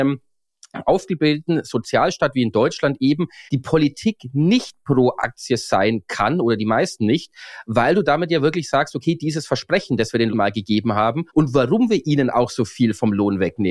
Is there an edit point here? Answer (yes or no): yes